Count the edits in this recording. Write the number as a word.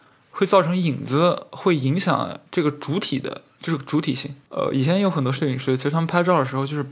two